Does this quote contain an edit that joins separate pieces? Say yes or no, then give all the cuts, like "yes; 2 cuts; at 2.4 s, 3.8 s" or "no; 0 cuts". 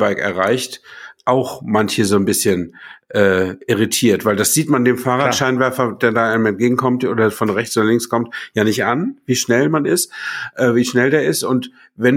no; 0 cuts